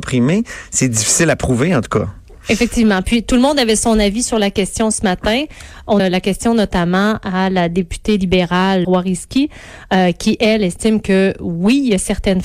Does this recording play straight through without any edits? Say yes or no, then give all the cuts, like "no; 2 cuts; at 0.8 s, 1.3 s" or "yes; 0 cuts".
no; 2 cuts; at 6.0 s, 8.8 s